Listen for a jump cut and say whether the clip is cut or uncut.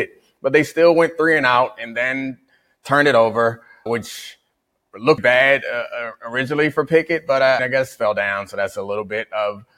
cut